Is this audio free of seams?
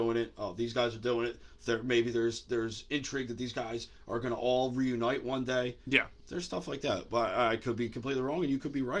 no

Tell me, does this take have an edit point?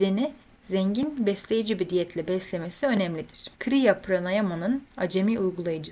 yes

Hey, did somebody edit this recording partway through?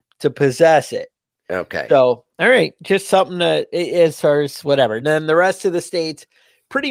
no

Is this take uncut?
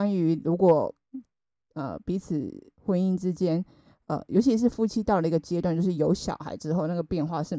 yes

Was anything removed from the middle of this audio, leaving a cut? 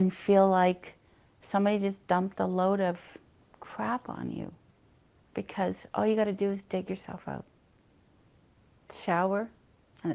no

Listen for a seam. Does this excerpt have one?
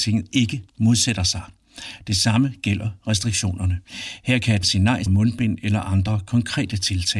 yes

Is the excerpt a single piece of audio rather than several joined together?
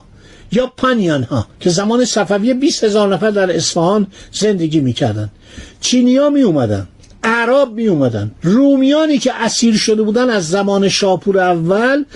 no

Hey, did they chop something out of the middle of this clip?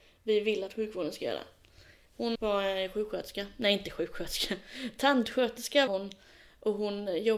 yes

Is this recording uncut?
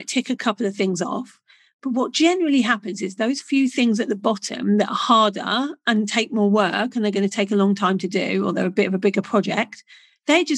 yes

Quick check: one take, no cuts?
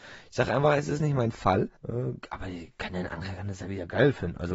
no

